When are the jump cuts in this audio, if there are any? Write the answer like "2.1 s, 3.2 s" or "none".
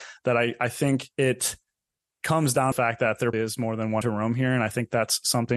1.1 s, 2.7 s, 3.3 s, 4.0 s

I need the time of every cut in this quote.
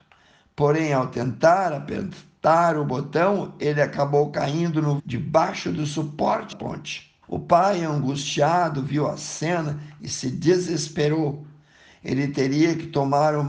5.0 s, 6.5 s, 7.2 s

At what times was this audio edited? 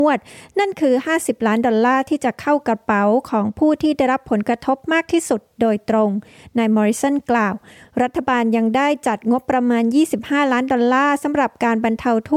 none

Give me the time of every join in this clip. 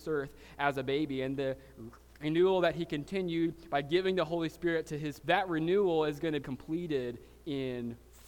5.2 s, 6.4 s

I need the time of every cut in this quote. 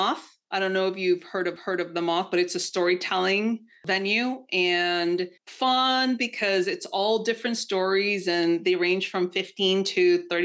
1.6 s, 5.4 s

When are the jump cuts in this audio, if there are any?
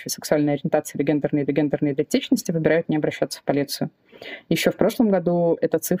1.5 s

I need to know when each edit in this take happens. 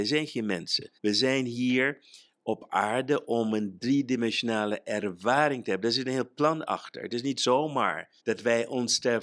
1.0 s, 8.2 s

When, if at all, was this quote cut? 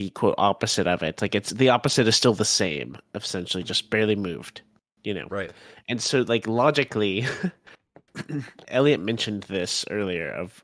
8.6 s

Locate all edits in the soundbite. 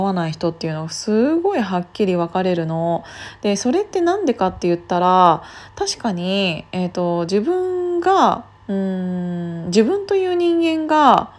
8.6 s

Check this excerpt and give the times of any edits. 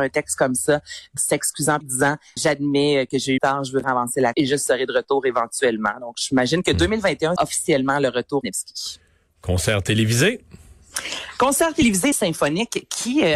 1.2 s, 1.8 s, 2.4 s, 3.4 s, 3.8 s, 4.3 s, 7.4 s, 8.4 s, 12.1 s

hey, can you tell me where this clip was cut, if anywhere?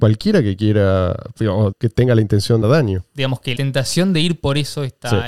1.7 s, 2.6 s, 3.6 s

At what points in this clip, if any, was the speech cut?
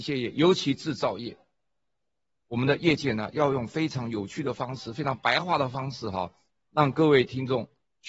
none

